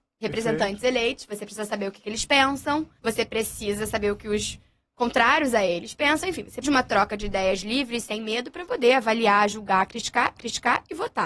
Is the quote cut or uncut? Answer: cut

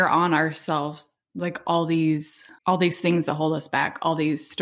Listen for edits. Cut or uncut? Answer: cut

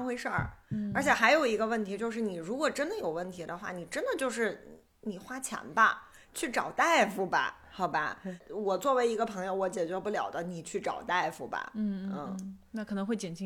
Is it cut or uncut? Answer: uncut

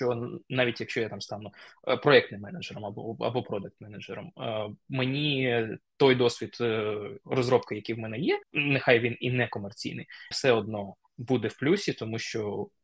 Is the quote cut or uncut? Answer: cut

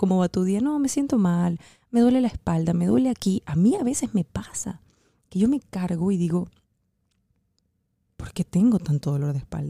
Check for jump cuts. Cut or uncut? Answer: uncut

